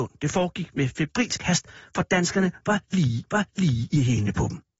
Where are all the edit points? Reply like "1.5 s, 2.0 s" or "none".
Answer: 3.2 s